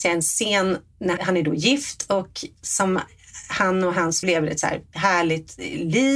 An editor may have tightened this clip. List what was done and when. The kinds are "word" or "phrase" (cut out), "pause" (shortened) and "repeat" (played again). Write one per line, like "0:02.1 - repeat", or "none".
0:01.2 - word
0:04.2 - word

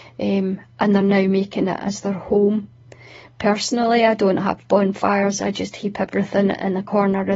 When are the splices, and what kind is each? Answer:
none

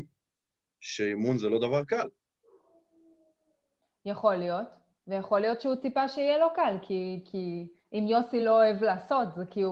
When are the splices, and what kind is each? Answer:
none

